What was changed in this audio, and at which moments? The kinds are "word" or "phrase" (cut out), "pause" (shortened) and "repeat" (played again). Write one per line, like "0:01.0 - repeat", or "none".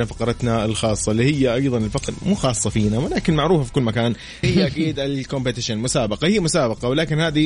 0:02.1 - word
0:04.4 - word

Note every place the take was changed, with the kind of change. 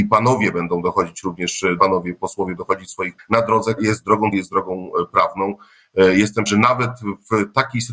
0:01.8 - word
0:02.6 - word
0:03.2 - word
0:03.8 - word
0:04.3 - word
0:06.5 - word

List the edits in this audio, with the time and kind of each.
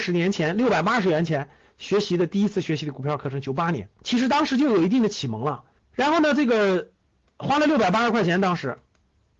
0:03.9 - pause
0:05.8 - pause

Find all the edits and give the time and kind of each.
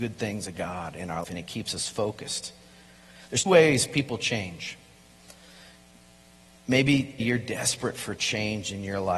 0:01.2 - word
0:03.5 - word
0:07.2 - word

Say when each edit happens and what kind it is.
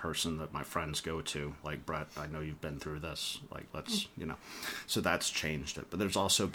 none

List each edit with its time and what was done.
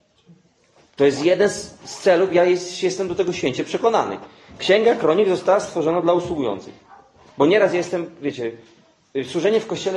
none

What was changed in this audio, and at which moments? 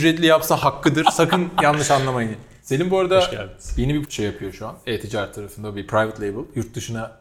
0:04.0 - word

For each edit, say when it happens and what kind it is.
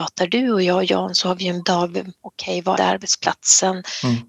0:01.6 - word
0:02.8 - phrase

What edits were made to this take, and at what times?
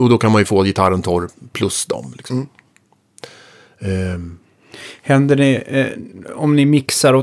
none

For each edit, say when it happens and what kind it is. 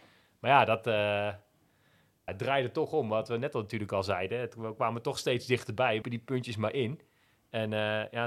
0:02.3 - word
0:06.0 - word

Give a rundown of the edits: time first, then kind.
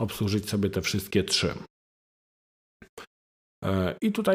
none

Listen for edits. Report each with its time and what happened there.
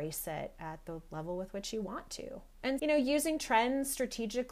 0:02.8 - word

